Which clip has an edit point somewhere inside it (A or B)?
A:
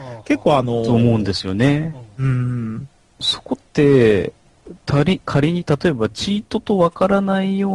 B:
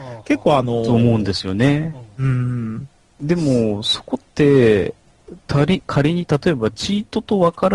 A